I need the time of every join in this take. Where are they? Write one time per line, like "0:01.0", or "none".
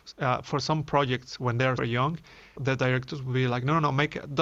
0:01.8
0:02.6